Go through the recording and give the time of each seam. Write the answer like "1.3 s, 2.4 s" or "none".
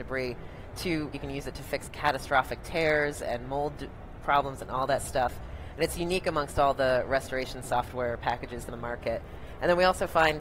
1.1 s, 8.7 s

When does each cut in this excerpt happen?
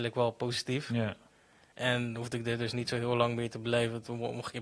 none

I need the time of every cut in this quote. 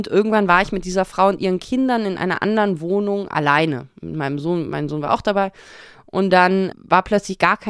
6.7 s

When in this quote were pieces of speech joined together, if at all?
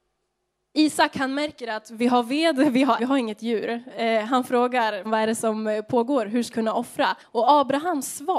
3.0 s, 5.0 s, 6.5 s, 7.2 s

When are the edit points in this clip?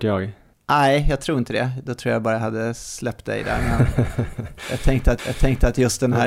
5.2 s

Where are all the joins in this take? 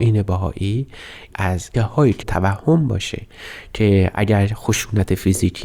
1.3 s, 1.7 s, 2.2 s

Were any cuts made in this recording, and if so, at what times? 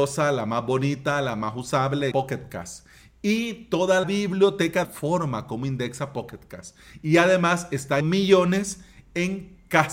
2.1 s, 4.0 s, 4.8 s, 8.0 s

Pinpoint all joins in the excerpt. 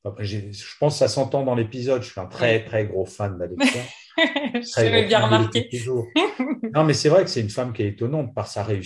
none

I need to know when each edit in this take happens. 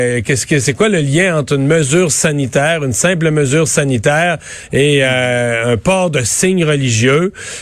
none

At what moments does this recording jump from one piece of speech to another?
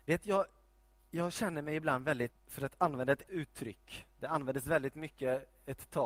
2.3 s, 3.3 s

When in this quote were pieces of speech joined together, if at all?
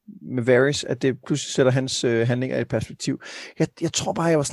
none

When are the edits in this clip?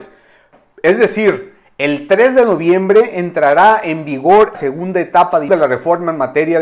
4.5 s, 5.5 s

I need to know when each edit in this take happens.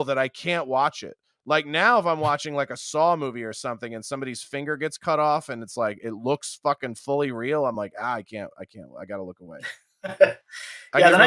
none

